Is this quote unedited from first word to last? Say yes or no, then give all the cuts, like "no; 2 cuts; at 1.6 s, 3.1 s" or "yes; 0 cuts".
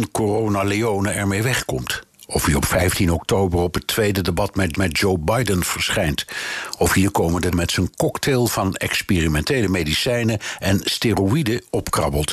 no; 2 cuts; at 4.7 s, 7.5 s